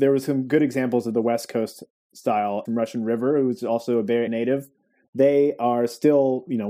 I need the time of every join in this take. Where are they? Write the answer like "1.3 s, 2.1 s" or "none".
2.6 s, 4.3 s